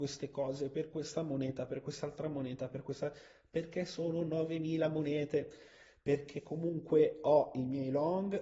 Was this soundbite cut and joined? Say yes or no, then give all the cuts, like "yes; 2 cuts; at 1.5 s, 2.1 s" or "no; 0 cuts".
no; 0 cuts